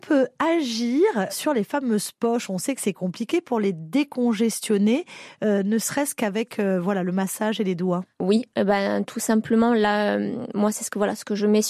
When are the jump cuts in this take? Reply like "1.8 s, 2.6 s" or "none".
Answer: 1.3 s, 8.1 s